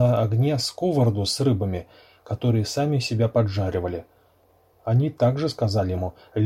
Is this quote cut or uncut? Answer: uncut